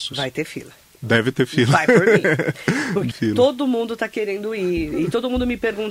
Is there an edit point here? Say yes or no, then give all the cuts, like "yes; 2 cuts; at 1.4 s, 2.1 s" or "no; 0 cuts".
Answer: yes; 1 cut; at 3.1 s